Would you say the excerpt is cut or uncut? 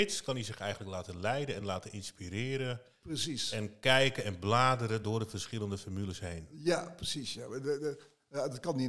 uncut